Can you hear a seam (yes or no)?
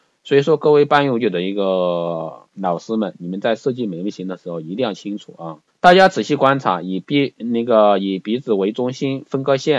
yes